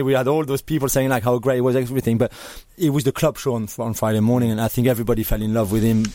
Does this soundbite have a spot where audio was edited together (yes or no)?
no